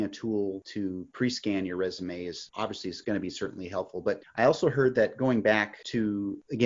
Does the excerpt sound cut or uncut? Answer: uncut